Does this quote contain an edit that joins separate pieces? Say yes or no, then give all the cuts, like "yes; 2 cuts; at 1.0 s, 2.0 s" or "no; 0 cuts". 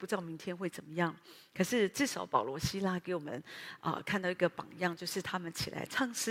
no; 0 cuts